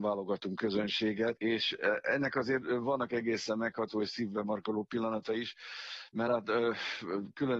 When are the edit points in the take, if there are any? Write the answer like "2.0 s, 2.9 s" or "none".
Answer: none